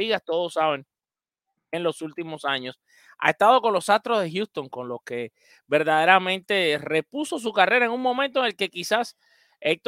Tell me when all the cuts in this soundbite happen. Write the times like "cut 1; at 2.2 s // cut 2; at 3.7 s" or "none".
none